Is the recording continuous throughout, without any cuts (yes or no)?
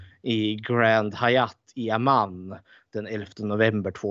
yes